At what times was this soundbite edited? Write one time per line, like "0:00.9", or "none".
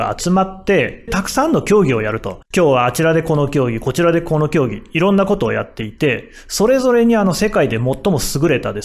0:01.1
0:02.5